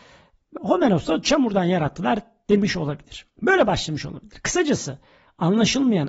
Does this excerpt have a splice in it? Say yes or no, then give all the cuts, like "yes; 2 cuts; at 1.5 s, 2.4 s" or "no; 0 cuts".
no; 0 cuts